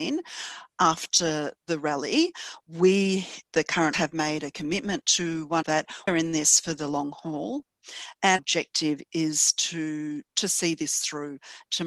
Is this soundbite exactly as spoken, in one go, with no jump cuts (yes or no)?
no